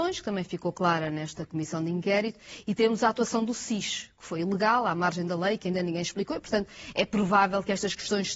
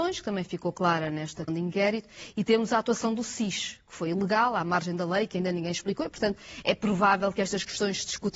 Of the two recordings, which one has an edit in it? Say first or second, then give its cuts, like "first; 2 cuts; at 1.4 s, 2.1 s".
second; 1 cut; at 1.5 s